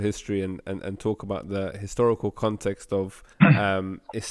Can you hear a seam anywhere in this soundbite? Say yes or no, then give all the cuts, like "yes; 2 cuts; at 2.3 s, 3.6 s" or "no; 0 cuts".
yes; 1 cut; at 3.3 s